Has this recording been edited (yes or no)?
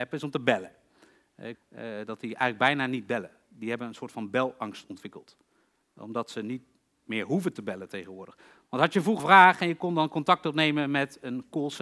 yes